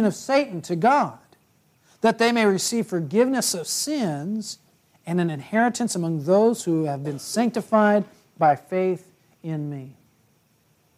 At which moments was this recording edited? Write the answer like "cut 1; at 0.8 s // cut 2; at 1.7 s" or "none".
none